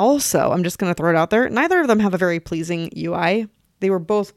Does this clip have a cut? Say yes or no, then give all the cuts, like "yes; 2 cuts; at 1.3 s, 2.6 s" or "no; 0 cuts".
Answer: no; 0 cuts